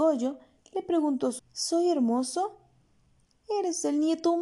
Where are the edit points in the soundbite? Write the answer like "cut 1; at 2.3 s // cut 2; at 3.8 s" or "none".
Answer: cut 1; at 1.4 s